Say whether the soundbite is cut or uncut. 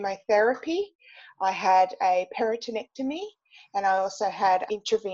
uncut